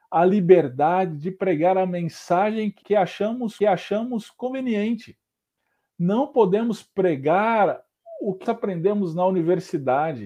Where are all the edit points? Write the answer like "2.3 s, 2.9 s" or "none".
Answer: 2.8 s, 3.6 s, 8.5 s